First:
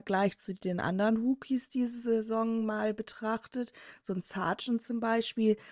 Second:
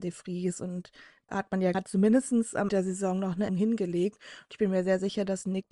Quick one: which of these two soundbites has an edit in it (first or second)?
second